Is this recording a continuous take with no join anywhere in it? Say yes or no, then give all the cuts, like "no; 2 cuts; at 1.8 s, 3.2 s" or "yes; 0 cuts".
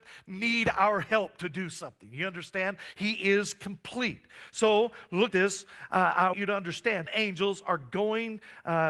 no; 3 cuts; at 5.3 s, 6.3 s, 7.1 s